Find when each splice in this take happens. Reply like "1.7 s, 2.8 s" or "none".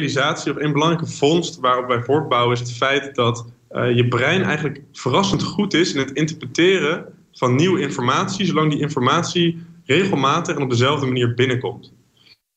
none